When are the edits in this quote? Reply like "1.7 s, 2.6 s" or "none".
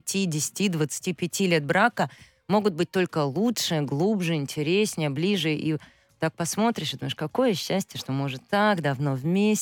none